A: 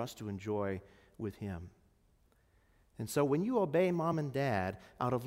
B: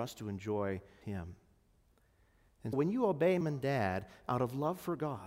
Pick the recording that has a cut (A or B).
B